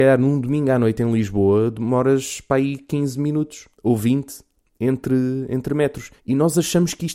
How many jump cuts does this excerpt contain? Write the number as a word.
two